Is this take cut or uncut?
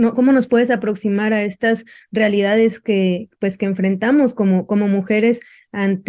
uncut